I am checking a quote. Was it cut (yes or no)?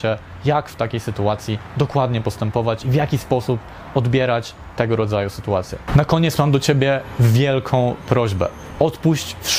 no